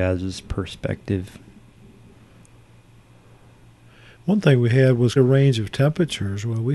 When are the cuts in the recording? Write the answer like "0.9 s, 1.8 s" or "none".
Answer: 5.2 s